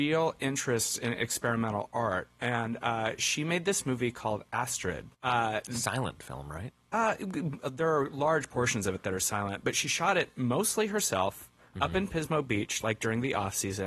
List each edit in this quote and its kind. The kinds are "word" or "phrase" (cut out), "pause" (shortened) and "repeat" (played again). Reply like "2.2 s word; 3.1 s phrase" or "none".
5.1 s pause